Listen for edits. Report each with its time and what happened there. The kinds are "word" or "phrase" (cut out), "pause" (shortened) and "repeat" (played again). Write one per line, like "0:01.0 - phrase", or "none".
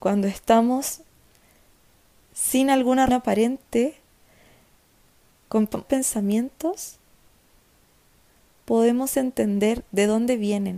0:03.1 - word
0:05.8 - word